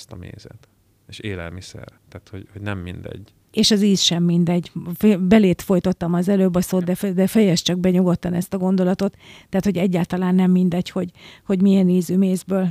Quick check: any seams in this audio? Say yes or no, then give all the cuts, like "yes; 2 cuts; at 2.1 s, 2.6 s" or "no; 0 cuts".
yes; 2 cuts; at 2.0 s, 3.4 s